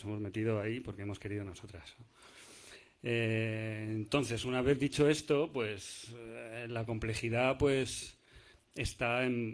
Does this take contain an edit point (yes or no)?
no